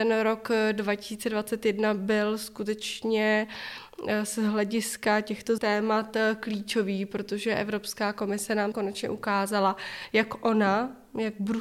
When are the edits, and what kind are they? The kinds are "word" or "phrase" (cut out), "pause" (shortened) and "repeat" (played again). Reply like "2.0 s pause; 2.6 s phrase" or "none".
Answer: 5.6 s word; 8.7 s word

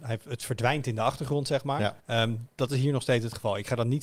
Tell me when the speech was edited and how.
2.0 s pause

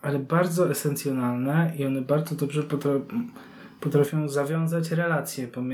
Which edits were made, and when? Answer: none

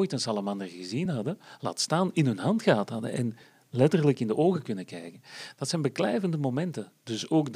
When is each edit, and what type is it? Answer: none

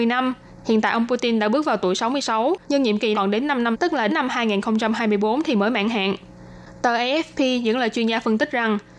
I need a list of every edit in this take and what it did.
2.6 s pause; 3.1 s phrase; 3.7 s word; 4.1 s word

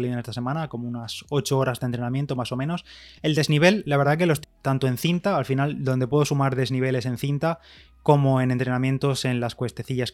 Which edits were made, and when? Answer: 4.4 s word

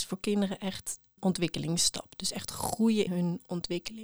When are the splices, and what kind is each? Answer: 1.2 s word; 3.1 s word

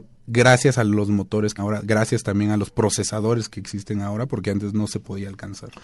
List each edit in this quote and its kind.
1.6 s word

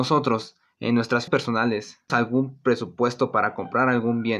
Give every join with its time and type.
1.3 s word; 2.1 s word

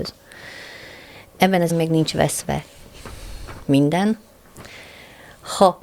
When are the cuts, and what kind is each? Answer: 1.7 s word

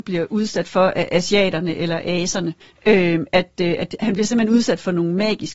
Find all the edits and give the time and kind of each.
2.6 s pause

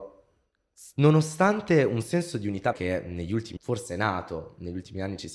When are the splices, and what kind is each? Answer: 2.7 s word; 3.6 s word

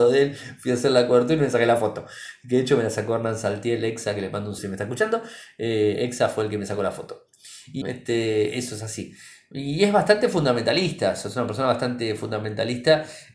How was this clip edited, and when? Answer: 4.6 s word; 7.8 s word

